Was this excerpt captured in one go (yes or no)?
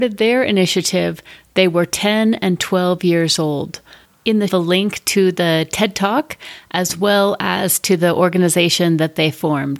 no